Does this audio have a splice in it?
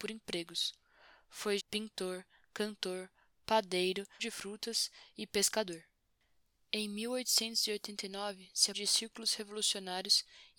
yes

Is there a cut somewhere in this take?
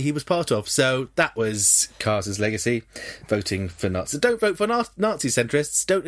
no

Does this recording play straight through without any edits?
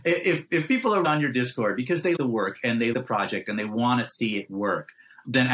no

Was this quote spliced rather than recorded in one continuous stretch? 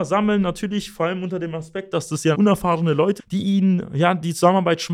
yes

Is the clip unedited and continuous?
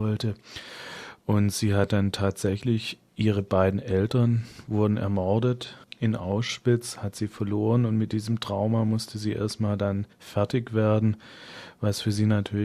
no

